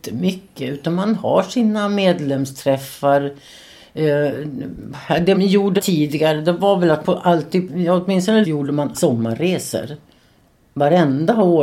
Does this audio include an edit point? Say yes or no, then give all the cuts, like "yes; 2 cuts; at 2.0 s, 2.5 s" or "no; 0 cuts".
yes; 6 cuts; at 5.3 s, 5.8 s, 7.0 s, 7.7 s, 8.4 s, 8.9 s